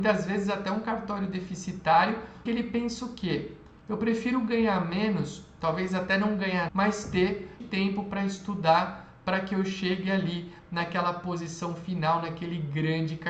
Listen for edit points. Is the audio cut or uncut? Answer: cut